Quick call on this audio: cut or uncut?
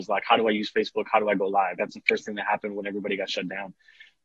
cut